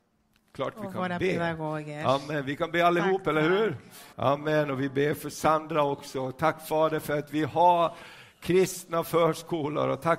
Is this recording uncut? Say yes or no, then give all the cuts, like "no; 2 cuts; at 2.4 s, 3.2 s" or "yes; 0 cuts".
no; 1 cut; at 4.1 s